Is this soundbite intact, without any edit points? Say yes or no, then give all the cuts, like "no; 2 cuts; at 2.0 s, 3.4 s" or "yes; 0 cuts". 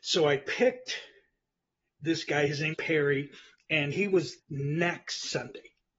no; 3 cuts; at 2.7 s, 3.9 s, 4.4 s